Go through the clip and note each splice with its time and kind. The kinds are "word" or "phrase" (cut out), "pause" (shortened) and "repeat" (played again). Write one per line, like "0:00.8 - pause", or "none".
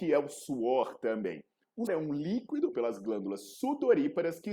0:01.9 - word
0:02.7 - word